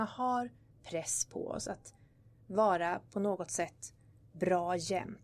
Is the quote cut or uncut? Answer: uncut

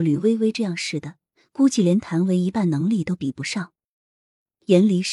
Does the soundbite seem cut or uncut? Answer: uncut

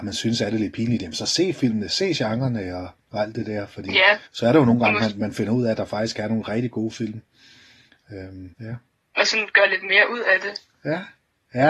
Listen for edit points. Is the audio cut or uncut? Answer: cut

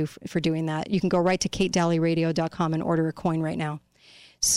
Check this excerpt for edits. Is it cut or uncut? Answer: uncut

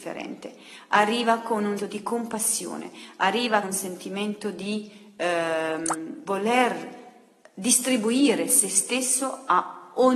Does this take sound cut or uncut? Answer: cut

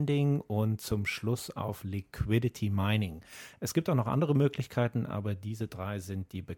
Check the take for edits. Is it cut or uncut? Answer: uncut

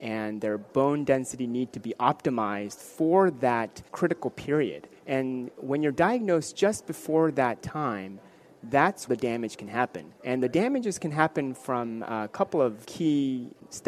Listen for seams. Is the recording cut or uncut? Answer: cut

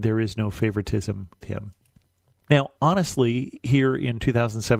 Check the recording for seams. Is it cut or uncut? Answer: cut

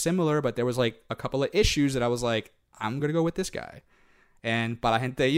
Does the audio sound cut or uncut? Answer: uncut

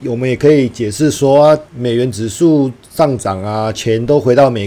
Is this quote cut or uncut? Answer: cut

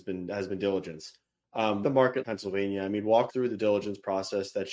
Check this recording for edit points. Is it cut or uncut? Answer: cut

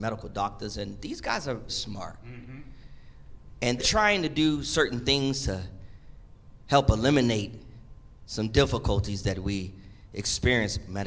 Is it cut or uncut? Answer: cut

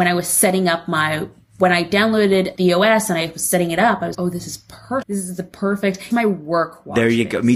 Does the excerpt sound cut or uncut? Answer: cut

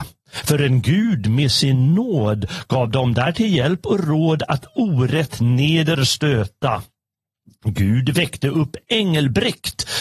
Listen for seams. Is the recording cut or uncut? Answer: uncut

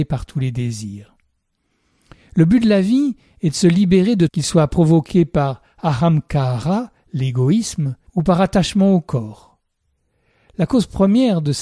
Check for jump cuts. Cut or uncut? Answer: cut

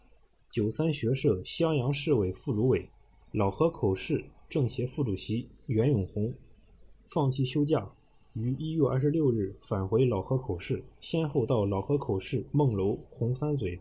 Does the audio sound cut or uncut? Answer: cut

